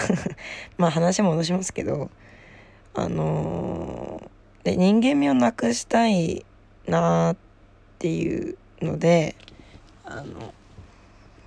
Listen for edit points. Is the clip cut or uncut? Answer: uncut